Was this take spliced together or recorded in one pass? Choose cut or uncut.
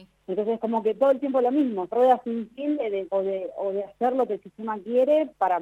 cut